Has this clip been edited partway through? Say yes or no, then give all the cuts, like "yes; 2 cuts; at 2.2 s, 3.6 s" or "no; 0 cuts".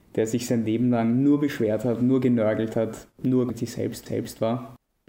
yes; 2 cuts; at 3.5 s, 4.1 s